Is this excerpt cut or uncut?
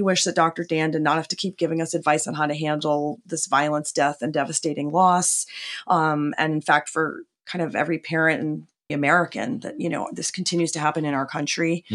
cut